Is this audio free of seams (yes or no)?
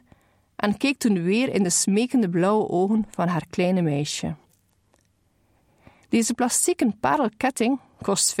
yes